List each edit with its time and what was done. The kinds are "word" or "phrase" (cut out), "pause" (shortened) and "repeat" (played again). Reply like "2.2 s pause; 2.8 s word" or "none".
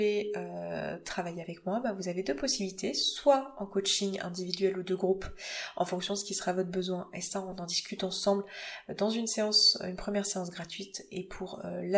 none